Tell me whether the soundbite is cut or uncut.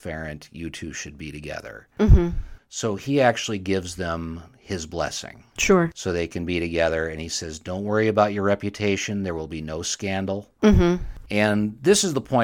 uncut